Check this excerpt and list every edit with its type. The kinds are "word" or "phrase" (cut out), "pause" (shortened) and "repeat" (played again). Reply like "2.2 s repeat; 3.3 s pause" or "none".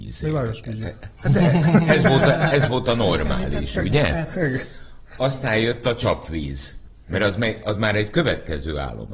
none